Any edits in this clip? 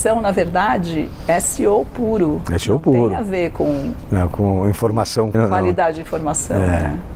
yes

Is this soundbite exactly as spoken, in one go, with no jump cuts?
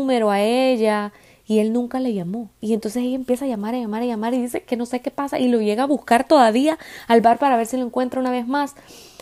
yes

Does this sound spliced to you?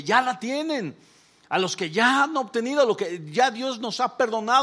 no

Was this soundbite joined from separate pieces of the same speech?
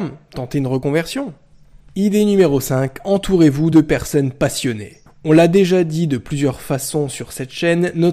no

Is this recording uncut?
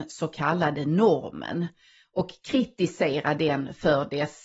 yes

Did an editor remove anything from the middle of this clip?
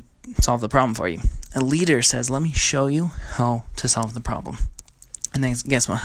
no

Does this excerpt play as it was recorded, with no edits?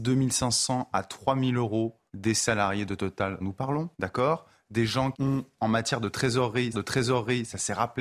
no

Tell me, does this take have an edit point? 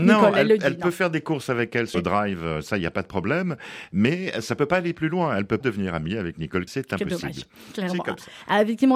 yes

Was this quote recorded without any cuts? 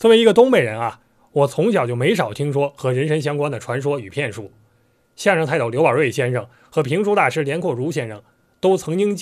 yes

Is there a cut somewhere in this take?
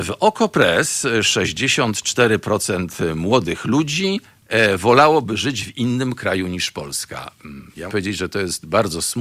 yes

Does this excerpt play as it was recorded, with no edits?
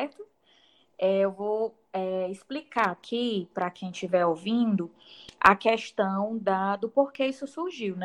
yes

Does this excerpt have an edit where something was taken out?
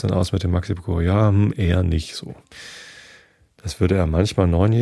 no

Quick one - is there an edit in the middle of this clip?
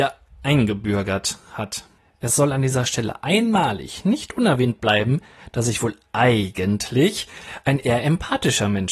yes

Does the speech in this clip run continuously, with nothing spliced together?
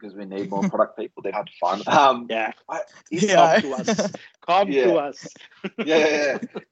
no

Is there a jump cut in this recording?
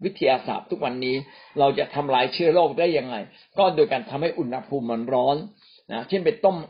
no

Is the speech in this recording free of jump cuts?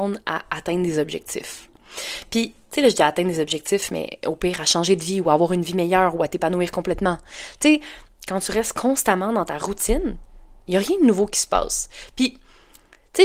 yes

